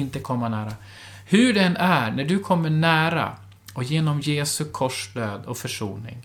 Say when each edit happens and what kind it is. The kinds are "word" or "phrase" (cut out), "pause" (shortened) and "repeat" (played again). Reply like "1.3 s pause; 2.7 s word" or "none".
none